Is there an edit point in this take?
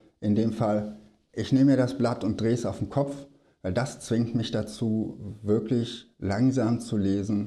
no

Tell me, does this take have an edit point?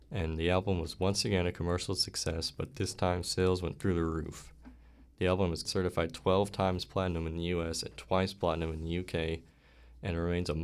yes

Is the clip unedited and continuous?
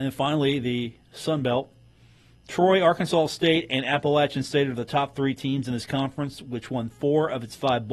yes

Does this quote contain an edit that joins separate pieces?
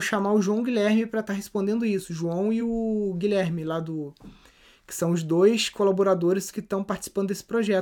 no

